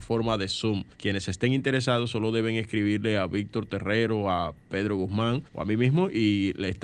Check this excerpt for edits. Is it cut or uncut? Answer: cut